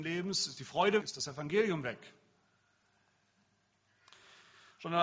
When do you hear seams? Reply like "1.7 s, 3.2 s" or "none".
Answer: 1.0 s